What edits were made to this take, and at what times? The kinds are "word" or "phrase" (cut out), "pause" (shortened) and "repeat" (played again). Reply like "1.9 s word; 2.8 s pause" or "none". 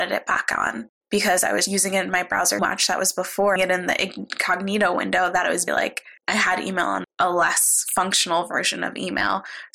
0.9 s pause; 1.7 s word; 2.6 s word; 3.6 s phrase; 5.7 s word; 6.2 s pause; 7.0 s phrase

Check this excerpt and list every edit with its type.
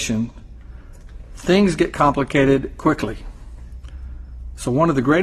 none

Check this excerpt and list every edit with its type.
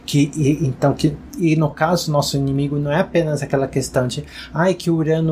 none

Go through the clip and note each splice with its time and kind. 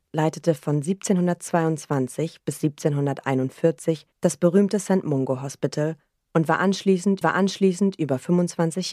4.1 s pause; 7.2 s repeat

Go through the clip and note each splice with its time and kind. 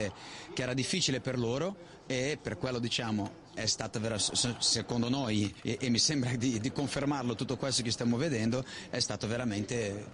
5.6 s pause

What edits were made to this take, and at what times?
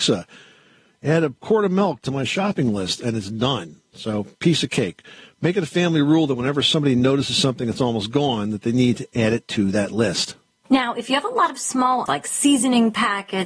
12.1 s word

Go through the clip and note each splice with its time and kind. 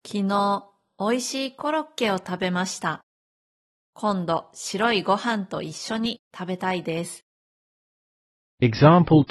none

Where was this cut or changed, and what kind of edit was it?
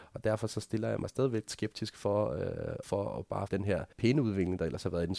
1.5 s word; 2.8 s word; 3.5 s phrase; 3.9 s pause

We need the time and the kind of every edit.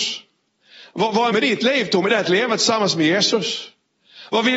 1.3 s word

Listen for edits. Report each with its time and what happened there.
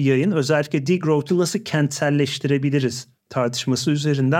none

